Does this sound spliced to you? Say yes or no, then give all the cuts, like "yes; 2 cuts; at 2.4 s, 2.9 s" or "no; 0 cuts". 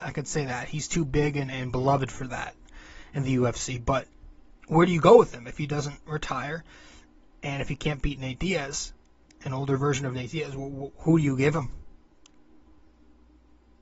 no; 0 cuts